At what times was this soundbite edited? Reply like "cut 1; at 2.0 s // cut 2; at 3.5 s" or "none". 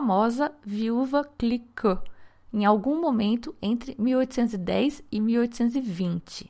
none

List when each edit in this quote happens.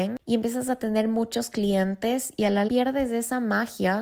cut 1; at 2.7 s

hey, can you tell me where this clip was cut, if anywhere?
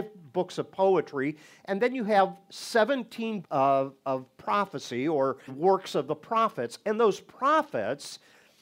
cut 1; at 3.4 s // cut 2; at 5.5 s

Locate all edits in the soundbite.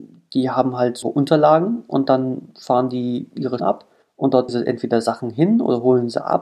cut 1; at 1.0 s // cut 2; at 3.6 s // cut 3; at 4.0 s // cut 4; at 4.5 s

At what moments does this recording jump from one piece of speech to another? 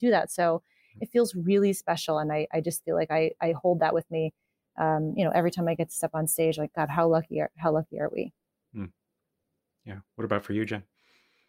none

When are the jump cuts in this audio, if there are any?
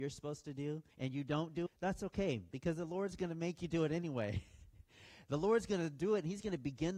cut 1; at 0.9 s // cut 2; at 1.7 s

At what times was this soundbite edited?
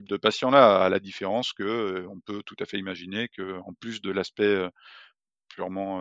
none

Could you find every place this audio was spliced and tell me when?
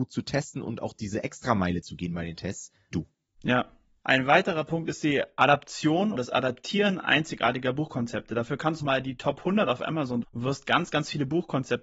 cut 1; at 2.9 s // cut 2; at 6.1 s // cut 3; at 8.8 s // cut 4; at 10.2 s

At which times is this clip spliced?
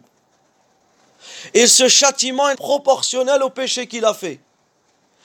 cut 1; at 2.5 s

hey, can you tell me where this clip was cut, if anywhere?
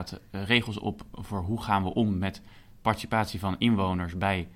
none

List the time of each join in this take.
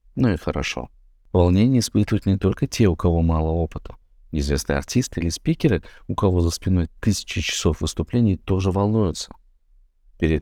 none

